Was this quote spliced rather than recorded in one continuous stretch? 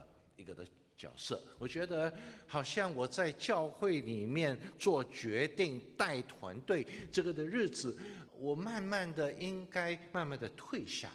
yes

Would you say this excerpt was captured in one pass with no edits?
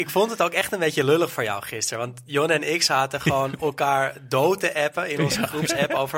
yes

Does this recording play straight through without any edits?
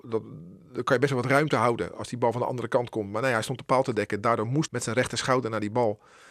no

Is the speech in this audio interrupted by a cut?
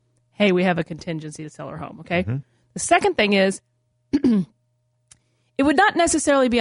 no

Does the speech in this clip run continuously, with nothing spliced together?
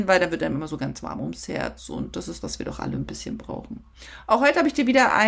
no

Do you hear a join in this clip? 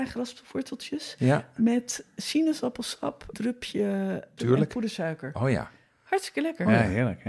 yes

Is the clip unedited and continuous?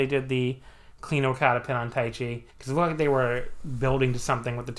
no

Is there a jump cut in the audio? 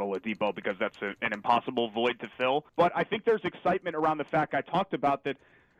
yes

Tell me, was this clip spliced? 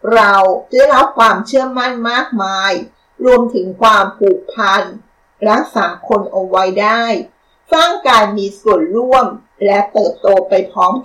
no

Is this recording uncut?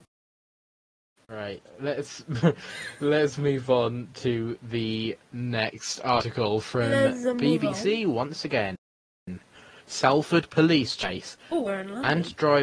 yes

